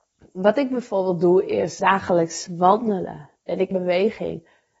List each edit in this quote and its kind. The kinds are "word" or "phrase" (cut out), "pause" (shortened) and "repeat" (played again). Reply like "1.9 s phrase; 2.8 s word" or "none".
1.8 s word; 3.7 s word